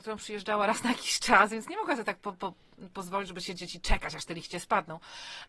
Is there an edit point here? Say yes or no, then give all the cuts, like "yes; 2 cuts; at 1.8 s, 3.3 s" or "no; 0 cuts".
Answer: no; 0 cuts